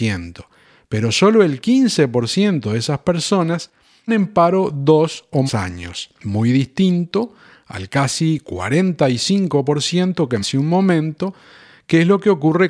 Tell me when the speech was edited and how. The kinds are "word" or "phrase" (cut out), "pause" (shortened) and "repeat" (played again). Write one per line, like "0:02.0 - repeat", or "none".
0:04.1 - word
0:05.5 - word
0:10.4 - word